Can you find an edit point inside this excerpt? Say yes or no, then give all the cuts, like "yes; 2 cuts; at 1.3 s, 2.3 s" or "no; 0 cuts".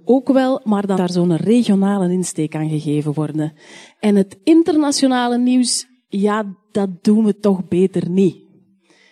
yes; 1 cut; at 0.9 s